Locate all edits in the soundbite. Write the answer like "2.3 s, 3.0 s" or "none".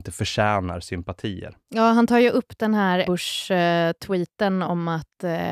1.6 s, 3.0 s